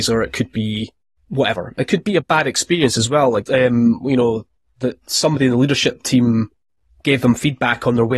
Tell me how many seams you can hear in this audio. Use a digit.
3